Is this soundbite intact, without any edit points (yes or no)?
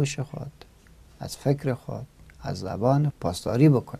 no